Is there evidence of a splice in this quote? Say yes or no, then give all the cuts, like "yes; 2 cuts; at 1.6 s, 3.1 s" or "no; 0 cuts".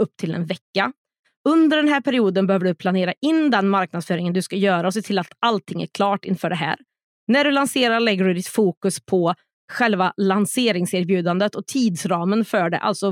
no; 0 cuts